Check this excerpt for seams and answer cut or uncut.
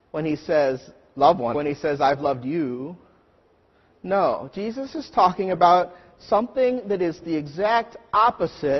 cut